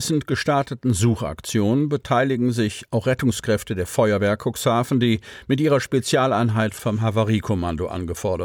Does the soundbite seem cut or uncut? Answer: uncut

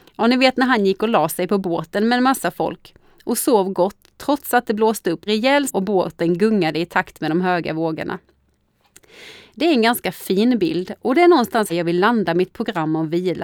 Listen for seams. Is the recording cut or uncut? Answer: cut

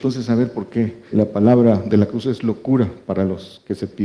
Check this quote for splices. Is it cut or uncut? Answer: cut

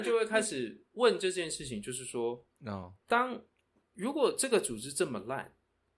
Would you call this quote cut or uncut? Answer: cut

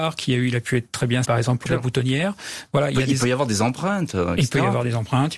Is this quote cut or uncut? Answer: cut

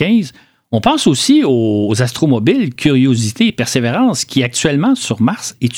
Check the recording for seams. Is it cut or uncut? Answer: uncut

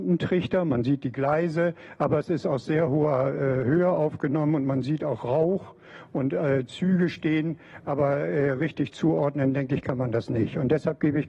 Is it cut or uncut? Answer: uncut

